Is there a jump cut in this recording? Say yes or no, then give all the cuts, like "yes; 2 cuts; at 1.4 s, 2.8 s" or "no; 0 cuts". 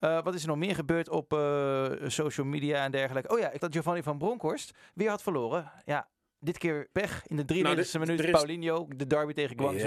yes; 2 cuts; at 3.6 s, 6.9 s